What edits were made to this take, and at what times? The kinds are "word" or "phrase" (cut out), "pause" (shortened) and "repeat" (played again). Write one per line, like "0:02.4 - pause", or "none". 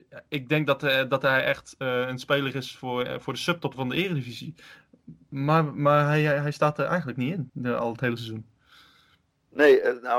0:03.7 - word
0:07.5 - pause